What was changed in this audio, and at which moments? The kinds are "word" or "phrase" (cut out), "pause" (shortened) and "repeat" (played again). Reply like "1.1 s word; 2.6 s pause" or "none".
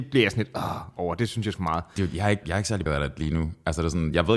1.5 s word; 2.4 s word; 2.9 s word